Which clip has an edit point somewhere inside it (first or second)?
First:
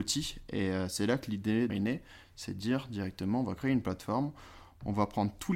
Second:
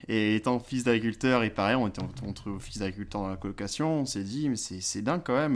first